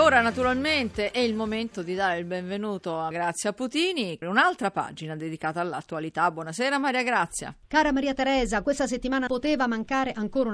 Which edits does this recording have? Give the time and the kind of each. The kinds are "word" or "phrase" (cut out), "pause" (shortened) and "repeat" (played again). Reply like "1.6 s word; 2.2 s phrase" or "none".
3.1 s word; 4.2 s phrase; 9.3 s word